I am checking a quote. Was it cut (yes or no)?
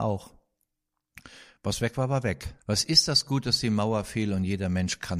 yes